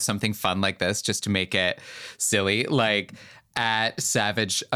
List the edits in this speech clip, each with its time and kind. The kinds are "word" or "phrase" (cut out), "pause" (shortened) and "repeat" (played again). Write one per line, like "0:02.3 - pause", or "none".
none